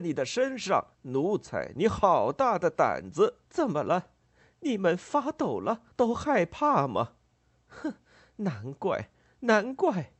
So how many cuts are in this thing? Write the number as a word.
three